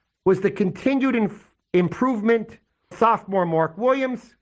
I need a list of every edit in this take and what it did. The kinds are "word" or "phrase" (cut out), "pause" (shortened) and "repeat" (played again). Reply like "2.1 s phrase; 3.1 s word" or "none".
2.9 s word

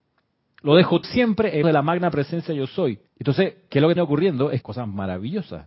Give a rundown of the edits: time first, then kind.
1.0 s word; 1.6 s word; 3.1 s pause; 4.0 s word; 4.6 s phrase

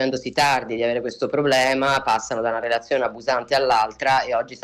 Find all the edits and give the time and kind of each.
none

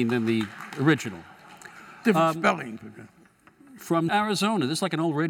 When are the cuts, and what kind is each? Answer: 4.1 s word

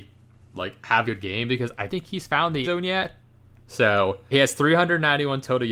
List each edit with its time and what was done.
1.0 s word; 1.9 s word; 2.6 s word; 4.3 s word

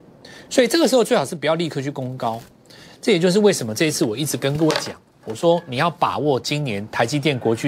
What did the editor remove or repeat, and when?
none

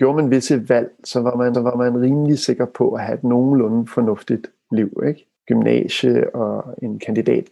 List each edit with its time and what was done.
1.5 s repeat; 5.4 s pause

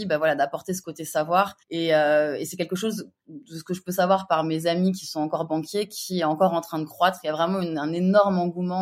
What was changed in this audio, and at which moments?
1.6 s pause

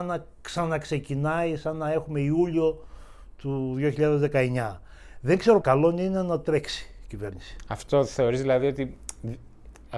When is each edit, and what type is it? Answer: 5.6 s phrase

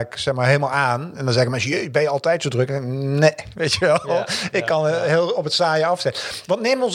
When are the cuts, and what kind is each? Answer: none

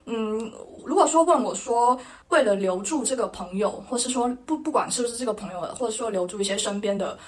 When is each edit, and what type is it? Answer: 2.2 s pause

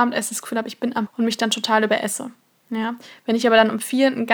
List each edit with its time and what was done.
1.1 s word

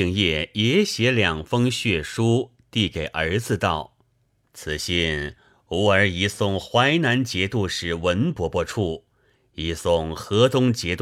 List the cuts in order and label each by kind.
none

